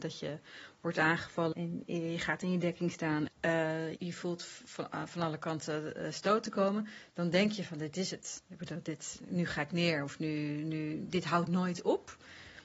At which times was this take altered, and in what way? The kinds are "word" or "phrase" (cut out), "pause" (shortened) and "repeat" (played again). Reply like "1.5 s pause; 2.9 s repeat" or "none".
1.5 s word; 3.3 s word; 4.0 s word